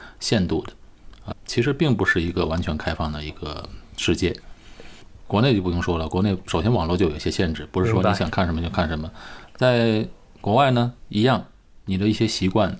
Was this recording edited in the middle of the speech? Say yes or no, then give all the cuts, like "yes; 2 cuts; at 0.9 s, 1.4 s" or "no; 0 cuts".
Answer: yes; 2 cuts; at 1.3 s, 11.0 s